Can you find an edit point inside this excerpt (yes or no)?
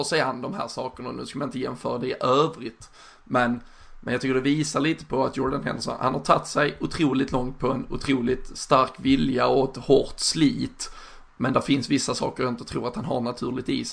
no